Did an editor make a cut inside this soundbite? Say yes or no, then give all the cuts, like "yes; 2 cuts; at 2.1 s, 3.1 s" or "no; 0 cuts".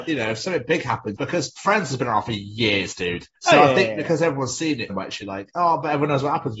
yes; 3 cuts; at 1.2 s, 3.4 s, 4.9 s